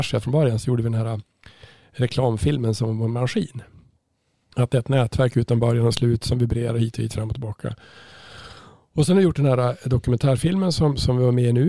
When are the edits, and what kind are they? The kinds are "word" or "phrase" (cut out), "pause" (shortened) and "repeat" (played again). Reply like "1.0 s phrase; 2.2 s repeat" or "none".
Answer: none